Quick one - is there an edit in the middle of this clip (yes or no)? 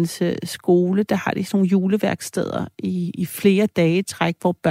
no